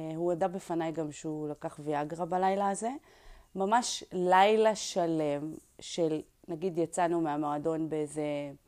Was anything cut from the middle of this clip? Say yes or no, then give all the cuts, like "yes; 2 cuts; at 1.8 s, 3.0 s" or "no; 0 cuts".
no; 0 cuts